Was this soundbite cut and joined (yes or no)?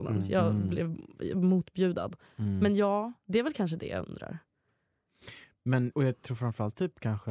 yes